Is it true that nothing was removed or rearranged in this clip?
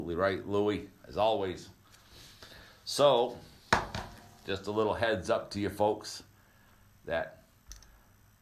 yes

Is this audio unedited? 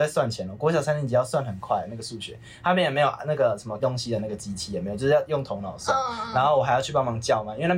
no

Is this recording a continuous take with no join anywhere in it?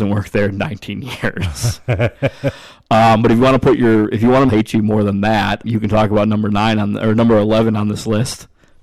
no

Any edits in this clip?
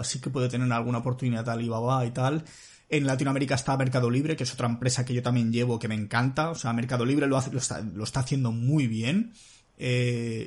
no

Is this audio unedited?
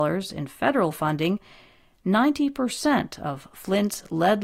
yes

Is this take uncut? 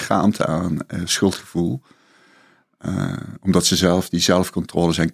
yes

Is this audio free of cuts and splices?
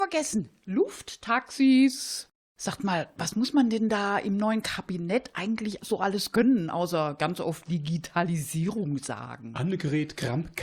yes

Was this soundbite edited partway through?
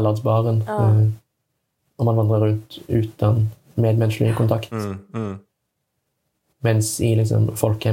no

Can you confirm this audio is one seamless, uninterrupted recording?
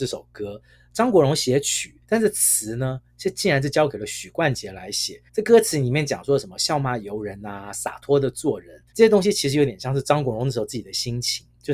no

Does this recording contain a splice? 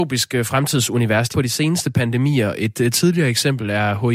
yes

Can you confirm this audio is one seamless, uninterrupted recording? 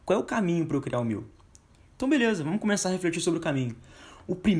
yes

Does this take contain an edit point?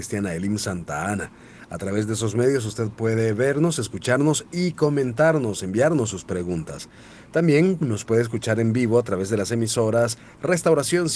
no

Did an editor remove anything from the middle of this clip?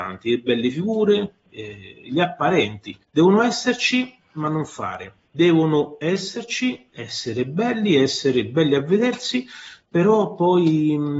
yes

